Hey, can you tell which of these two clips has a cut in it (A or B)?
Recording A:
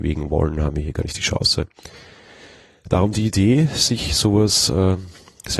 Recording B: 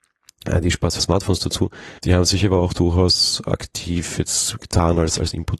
B